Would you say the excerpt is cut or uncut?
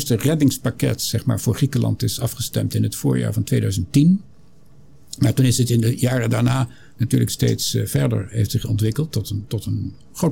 cut